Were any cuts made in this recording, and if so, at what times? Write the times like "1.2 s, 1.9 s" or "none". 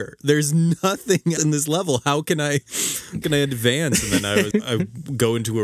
1.4 s, 3.2 s, 4.5 s